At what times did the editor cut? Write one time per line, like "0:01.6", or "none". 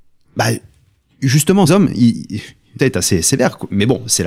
0:01.7
0:02.8